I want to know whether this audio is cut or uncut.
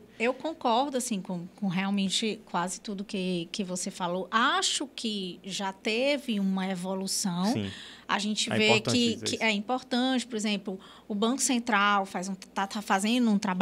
uncut